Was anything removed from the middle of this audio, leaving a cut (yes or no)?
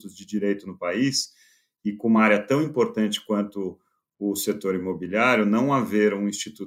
no